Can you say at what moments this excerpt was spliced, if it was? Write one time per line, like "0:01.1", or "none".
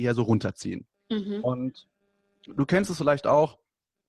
none